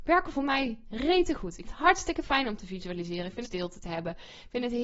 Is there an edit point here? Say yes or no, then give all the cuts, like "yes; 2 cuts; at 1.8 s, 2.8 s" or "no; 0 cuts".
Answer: yes; 2 cuts; at 1.6 s, 3.4 s